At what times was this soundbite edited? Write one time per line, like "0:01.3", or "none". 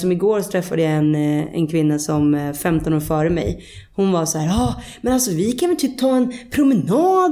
none